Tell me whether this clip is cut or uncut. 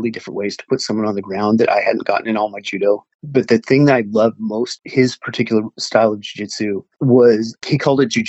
cut